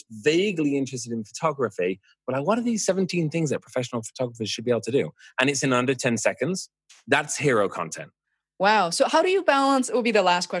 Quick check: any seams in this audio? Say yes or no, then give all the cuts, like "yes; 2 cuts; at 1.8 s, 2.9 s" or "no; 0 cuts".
no; 0 cuts